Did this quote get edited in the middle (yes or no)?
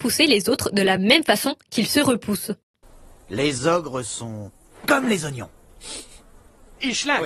no